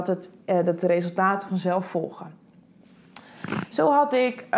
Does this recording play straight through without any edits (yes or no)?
yes